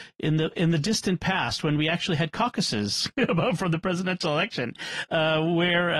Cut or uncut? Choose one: uncut